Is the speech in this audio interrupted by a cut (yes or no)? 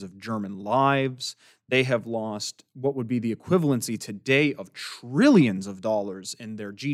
no